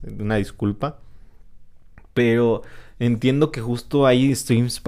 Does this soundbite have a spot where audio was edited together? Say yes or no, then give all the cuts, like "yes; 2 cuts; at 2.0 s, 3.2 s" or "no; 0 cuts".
no; 0 cuts